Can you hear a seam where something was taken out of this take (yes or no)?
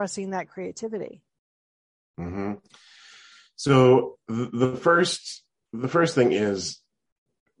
no